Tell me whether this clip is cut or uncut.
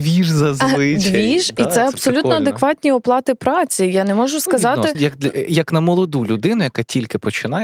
cut